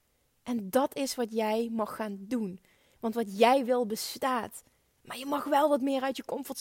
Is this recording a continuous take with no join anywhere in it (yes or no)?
yes